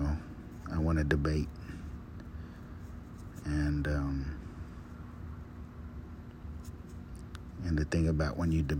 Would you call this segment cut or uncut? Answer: uncut